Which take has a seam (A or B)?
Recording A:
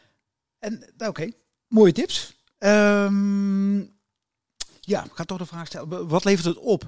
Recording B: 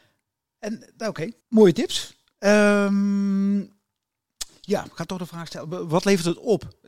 B